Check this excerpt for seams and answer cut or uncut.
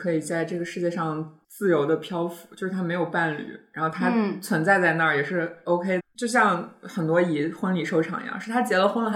cut